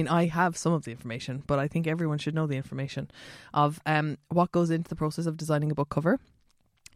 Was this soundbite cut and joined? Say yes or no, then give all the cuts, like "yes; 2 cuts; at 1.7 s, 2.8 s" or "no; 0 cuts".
no; 0 cuts